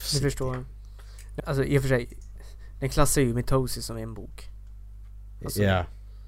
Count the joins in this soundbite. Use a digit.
1